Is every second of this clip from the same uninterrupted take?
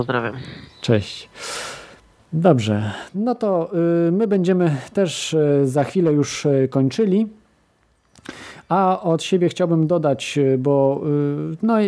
yes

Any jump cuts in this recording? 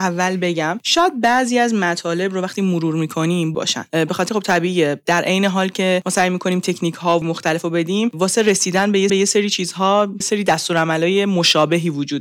yes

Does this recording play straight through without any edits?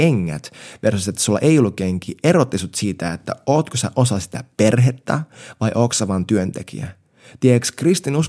yes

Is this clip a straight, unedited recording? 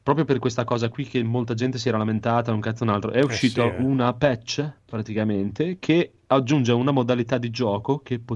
no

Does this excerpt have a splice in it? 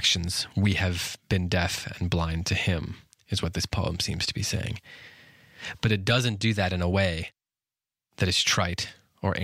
no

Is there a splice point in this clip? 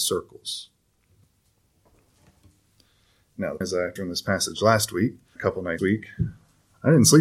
yes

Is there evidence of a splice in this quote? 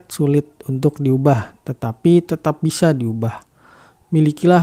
no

